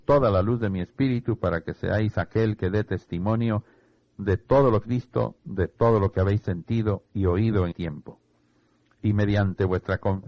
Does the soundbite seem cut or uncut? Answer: cut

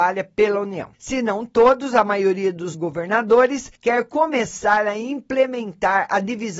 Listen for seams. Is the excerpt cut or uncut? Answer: cut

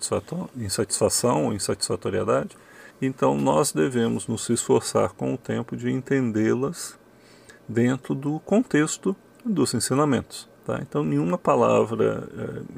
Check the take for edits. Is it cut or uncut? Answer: cut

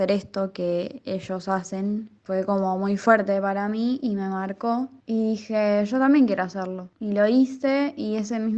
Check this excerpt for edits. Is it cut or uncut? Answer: uncut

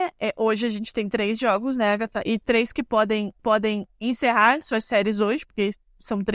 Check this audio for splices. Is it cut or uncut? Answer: cut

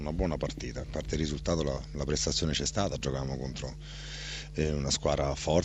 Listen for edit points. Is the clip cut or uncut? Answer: uncut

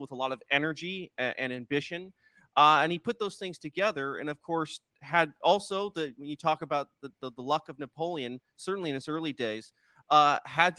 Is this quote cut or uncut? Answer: uncut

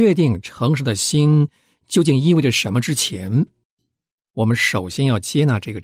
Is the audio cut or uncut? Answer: uncut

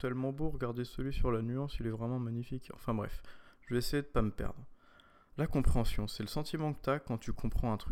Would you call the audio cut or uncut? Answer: uncut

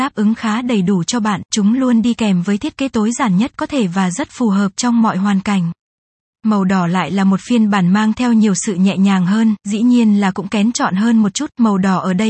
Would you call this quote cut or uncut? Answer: uncut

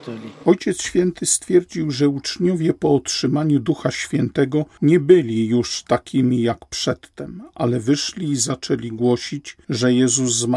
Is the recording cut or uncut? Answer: uncut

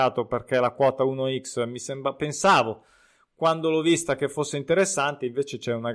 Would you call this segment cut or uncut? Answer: uncut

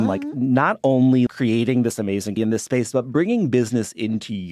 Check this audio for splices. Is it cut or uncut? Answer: cut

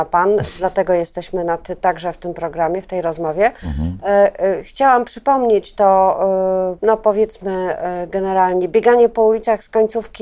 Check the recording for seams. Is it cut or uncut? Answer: cut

